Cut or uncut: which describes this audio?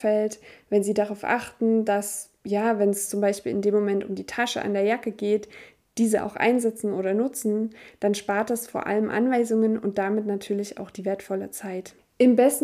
uncut